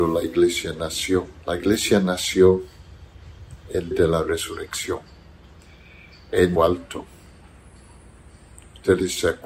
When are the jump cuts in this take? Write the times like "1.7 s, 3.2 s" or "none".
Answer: 1.4 s, 3.9 s, 6.6 s